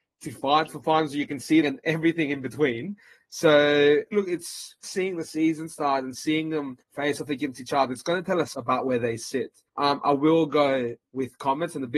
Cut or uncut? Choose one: cut